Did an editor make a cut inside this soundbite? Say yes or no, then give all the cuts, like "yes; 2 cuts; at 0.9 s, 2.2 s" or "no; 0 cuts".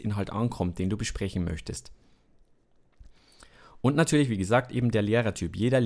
no; 0 cuts